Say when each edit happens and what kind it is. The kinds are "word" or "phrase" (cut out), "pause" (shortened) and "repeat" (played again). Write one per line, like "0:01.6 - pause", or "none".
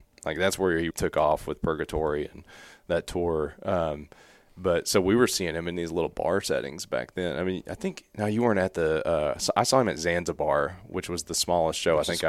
0:00.9 - word